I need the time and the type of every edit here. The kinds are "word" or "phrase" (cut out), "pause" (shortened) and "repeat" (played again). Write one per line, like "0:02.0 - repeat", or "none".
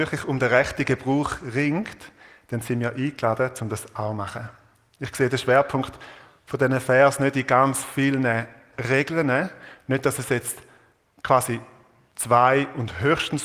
none